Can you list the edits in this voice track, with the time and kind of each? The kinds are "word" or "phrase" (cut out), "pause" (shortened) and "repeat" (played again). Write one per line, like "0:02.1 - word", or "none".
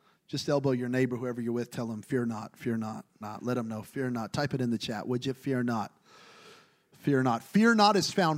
0:03.2 - word